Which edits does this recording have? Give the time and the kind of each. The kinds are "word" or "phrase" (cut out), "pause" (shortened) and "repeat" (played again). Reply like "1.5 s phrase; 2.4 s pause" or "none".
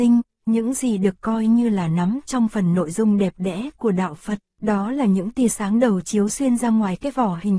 4.5 s pause